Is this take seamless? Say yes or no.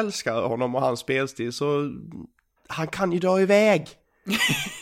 yes